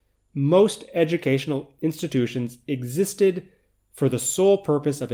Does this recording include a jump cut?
no; 0 cuts

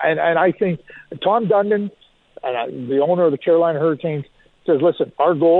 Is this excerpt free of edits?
yes; 0 cuts

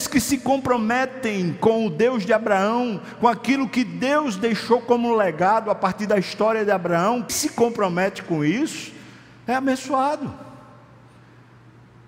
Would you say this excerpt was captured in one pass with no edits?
no; 1 cut; at 7.3 s

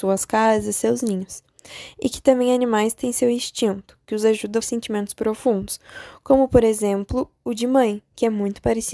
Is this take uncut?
no; 1 cut; at 4.6 s

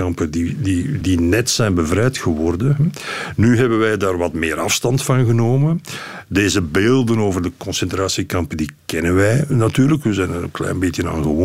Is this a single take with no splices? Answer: no; 2 cuts; at 1.0 s, 9.5 s

